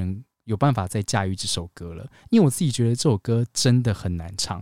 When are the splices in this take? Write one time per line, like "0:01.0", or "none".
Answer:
none